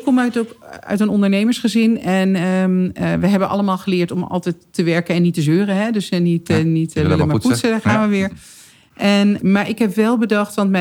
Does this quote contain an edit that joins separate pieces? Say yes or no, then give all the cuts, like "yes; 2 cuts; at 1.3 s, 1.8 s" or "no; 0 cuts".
no; 0 cuts